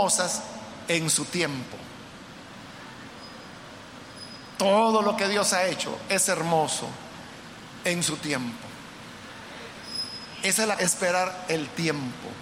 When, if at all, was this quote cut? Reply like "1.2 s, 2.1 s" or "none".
10.8 s